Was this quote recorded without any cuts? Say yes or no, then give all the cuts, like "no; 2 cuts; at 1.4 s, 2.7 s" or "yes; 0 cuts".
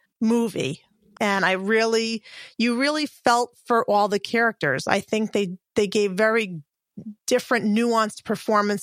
yes; 0 cuts